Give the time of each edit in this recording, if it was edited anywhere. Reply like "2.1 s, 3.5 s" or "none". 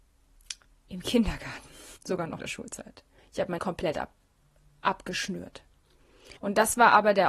2.0 s, 2.4 s, 3.2 s, 3.6 s, 6.4 s